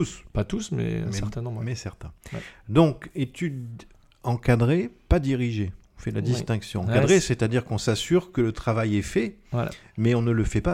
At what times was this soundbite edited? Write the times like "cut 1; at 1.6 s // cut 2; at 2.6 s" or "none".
none